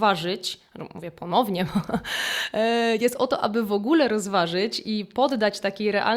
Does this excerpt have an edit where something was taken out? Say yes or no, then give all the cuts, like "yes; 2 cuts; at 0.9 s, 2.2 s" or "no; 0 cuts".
no; 0 cuts